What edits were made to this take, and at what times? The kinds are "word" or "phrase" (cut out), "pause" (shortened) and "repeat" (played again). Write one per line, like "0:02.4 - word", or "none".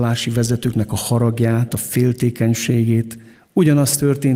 0:01.7 - phrase
0:03.3 - pause